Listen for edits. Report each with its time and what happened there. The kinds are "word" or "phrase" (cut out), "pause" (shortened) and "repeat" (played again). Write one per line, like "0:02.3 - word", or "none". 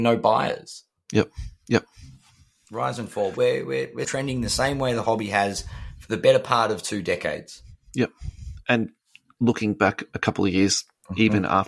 0:01.6 - pause
0:03.3 - word
0:04.0 - word